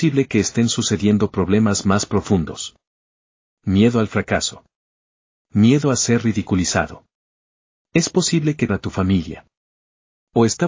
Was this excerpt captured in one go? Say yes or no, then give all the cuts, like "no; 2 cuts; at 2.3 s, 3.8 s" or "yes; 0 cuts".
no; 1 cut; at 8.7 s